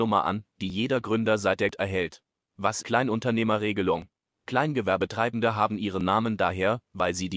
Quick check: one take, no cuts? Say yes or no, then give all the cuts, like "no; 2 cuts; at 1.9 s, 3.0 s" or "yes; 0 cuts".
no; 2 cuts; at 1.7 s, 2.8 s